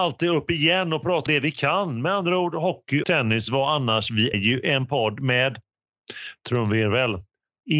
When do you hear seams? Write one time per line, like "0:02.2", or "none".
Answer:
0:01.3
0:03.0
0:04.3